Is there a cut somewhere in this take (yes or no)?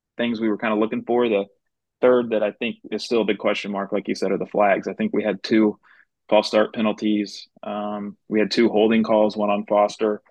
yes